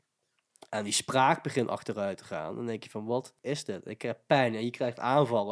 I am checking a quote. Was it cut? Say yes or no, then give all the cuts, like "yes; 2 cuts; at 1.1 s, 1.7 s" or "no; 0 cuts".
yes; 1 cut; at 3.4 s